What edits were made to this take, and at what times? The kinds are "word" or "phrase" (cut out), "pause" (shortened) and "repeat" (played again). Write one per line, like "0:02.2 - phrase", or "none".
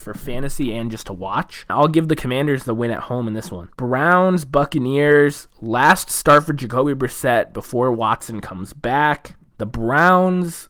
0:03.7 - pause
0:09.5 - pause